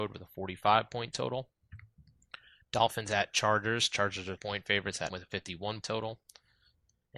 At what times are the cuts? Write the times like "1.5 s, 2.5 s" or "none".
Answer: 4.4 s, 5.1 s, 5.8 s